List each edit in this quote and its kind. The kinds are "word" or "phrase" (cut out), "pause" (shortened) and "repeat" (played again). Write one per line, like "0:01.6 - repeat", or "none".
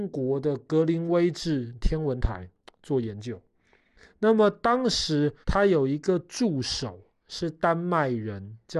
0:05.4 - pause